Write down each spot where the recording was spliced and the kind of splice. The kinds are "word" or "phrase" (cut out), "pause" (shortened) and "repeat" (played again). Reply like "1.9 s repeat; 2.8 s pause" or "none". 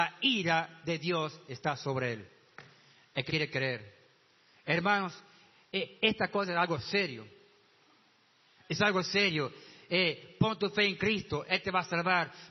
3.3 s word